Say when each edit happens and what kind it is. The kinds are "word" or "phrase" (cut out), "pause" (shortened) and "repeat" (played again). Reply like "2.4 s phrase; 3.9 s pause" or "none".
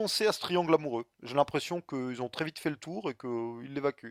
1.1 s pause